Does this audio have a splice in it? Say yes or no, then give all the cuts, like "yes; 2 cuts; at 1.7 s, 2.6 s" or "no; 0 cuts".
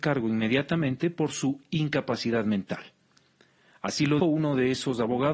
yes; 1 cut; at 4.2 s